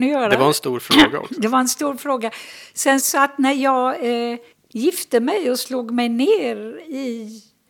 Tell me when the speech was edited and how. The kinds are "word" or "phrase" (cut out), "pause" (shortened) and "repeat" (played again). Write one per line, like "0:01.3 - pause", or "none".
0:03.0 - word
0:04.5 - pause